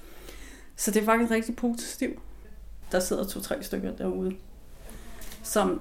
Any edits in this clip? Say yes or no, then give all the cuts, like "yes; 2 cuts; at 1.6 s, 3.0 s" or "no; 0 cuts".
no; 0 cuts